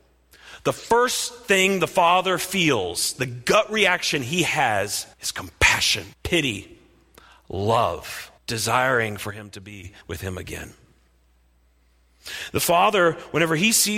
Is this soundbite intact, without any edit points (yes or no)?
no